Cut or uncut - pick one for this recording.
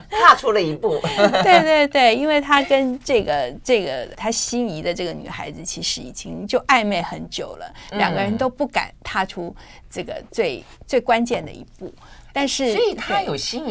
cut